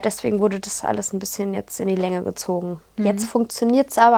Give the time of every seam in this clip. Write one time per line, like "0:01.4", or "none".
none